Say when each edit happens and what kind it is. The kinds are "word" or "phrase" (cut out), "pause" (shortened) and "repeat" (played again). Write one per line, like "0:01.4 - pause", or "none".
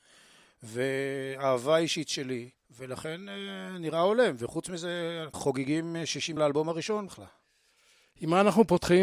0:02.6 - pause
0:05.3 - phrase
0:06.4 - word
0:07.1 - word